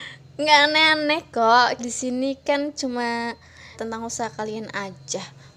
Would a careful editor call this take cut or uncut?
cut